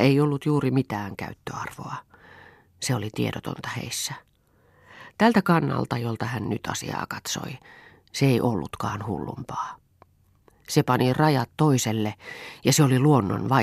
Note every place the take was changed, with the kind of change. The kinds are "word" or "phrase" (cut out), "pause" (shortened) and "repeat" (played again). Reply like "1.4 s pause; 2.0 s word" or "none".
none